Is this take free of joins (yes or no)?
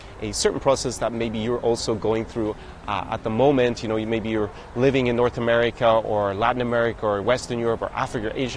yes